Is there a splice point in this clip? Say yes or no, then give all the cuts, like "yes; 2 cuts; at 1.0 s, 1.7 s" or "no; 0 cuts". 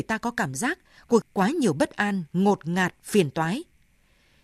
yes; 1 cut; at 1.2 s